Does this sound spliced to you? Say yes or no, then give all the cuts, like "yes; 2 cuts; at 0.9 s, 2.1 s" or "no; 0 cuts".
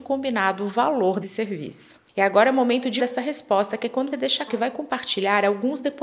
yes; 4 cuts; at 1.2 s, 3.0 s, 4.1 s, 4.5 s